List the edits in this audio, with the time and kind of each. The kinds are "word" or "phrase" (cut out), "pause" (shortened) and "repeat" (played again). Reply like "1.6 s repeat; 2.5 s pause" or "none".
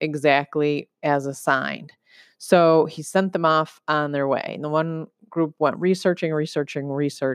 none